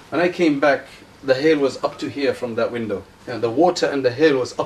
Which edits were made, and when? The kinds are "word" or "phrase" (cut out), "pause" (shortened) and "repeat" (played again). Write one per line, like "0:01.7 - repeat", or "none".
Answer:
0:01.0 - pause
0:03.2 - pause